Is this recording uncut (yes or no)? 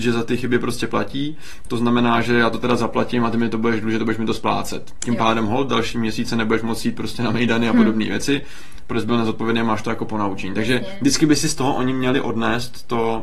yes